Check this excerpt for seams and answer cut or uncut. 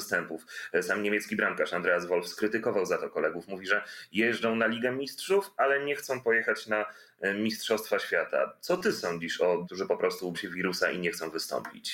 cut